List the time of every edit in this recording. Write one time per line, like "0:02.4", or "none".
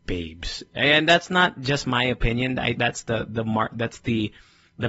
0:02.8